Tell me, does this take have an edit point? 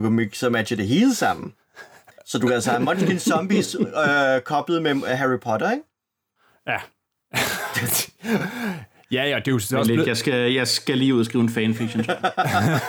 no; 0 cuts

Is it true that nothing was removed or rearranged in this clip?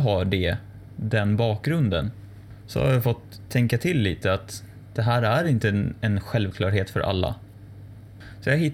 yes; 0 cuts

